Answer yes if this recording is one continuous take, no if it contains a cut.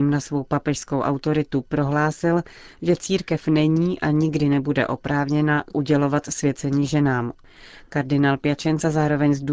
yes